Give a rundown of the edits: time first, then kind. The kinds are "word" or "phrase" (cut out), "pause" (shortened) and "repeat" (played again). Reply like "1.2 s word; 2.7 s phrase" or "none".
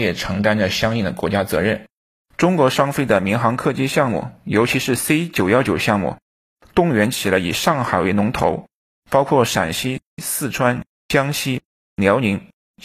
none